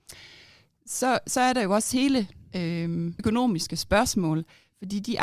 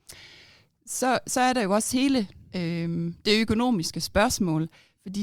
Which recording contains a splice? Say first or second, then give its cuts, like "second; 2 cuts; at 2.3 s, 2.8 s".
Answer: first; 1 cut; at 3.2 s